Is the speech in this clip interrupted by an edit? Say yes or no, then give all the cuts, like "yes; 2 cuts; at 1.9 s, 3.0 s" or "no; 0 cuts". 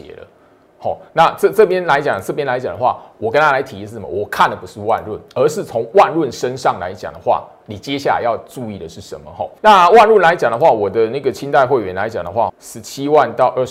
yes; 2 cuts; at 9.6 s, 12.5 s